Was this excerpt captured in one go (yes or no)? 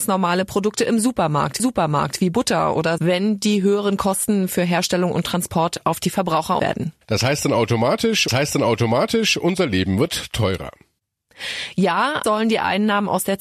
no